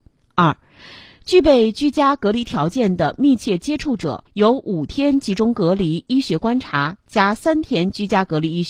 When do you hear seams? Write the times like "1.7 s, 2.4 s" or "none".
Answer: 4.3 s